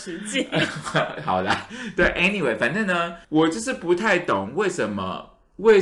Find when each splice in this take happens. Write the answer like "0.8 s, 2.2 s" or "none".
3.2 s